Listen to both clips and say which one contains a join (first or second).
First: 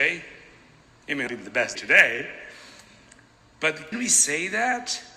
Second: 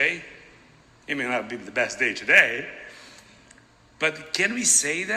first